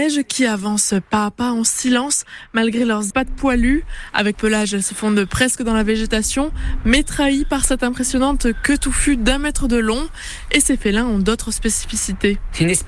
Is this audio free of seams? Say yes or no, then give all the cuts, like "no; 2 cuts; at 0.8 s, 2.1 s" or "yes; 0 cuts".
no; 2 cuts; at 3.1 s, 4.3 s